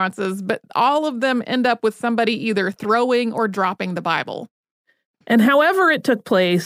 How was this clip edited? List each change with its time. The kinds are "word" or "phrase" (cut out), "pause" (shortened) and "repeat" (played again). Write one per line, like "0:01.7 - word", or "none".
none

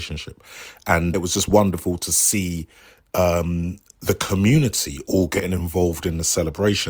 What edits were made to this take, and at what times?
0:01.1 - word

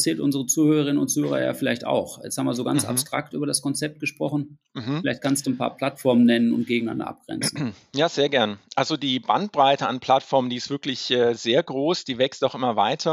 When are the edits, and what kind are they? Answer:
none

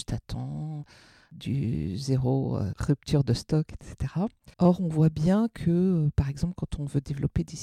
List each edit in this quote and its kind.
0:04.5 - pause

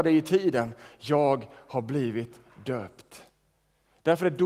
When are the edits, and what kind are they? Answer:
none

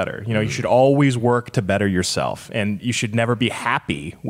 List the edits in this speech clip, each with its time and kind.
none

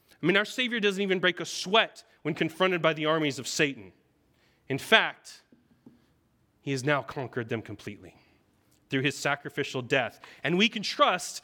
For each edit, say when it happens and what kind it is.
none

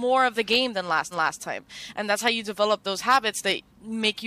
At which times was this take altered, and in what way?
0:01.1 - repeat

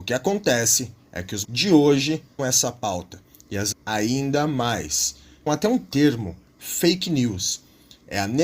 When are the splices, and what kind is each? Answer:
0:01.4 - word
0:02.4 - word
0:03.7 - word
0:05.5 - word

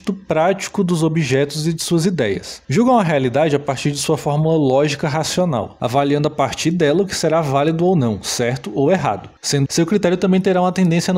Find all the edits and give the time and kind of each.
0:09.7 - word

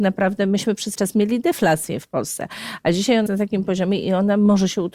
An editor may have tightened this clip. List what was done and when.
0:00.9 - word
0:03.3 - word

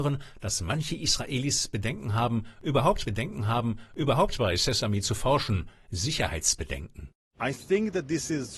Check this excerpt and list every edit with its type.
0:03.0 - repeat

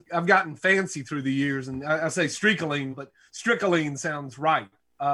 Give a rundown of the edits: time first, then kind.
0:02.9 - word

